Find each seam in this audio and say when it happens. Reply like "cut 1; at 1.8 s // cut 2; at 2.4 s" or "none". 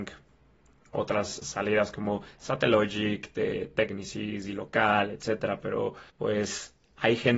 cut 1; at 6.1 s